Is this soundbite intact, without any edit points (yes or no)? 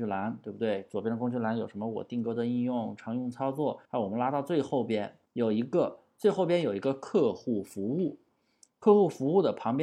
no